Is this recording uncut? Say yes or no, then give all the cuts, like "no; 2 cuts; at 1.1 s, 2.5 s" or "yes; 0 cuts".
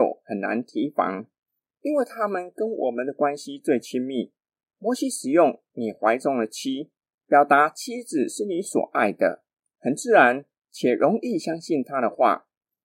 yes; 0 cuts